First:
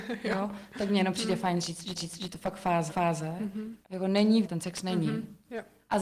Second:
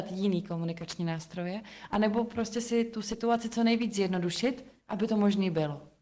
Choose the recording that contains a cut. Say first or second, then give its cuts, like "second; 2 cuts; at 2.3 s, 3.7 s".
first; 4 cuts; at 2.0 s, 2.9 s, 3.8 s, 4.4 s